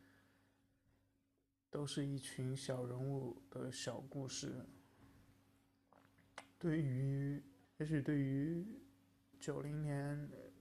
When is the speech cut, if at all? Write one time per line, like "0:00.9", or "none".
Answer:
0:07.6
0:09.3

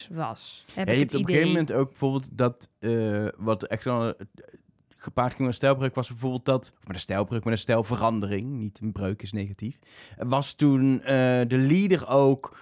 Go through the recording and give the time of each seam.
none

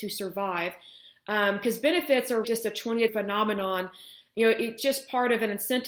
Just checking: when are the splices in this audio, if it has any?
0:02.4
0:03.1
0:04.8

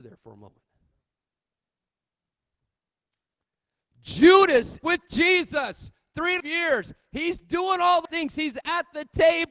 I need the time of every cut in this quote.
0:04.8
0:06.4
0:08.0

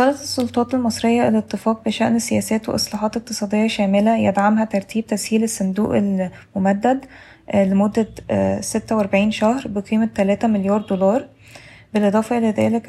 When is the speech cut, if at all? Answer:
none

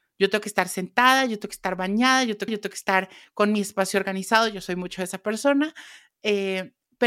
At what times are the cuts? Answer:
0:02.5

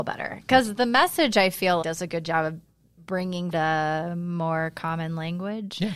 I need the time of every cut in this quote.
0:01.8
0:03.5

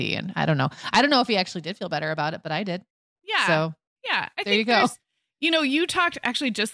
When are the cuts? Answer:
none

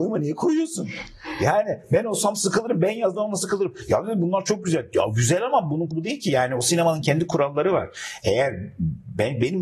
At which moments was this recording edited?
0:05.9

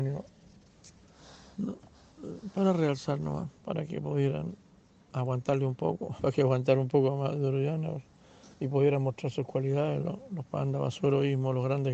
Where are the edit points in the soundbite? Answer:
0:03.6
0:04.8
0:08.5

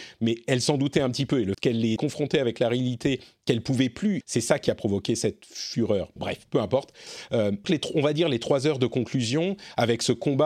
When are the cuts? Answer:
0:01.5
0:02.0
0:04.2
0:06.2
0:07.6

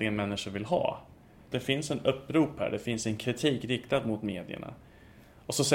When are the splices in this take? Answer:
none

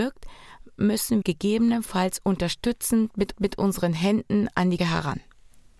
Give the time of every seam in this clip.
0:01.2
0:03.3
0:04.8

